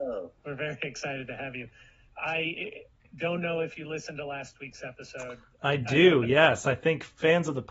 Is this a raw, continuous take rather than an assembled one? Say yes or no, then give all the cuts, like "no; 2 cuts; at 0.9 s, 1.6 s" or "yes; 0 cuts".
yes; 0 cuts